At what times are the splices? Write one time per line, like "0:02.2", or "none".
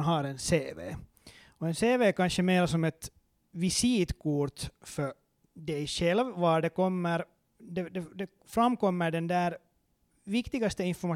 none